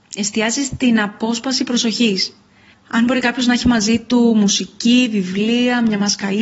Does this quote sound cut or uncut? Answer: cut